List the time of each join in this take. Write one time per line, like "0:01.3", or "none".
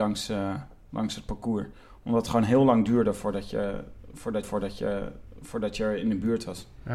0:04.4